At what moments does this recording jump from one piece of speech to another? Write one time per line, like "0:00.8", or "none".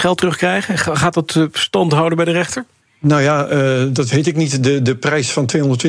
0:02.8